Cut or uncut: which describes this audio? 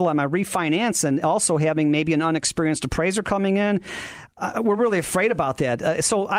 uncut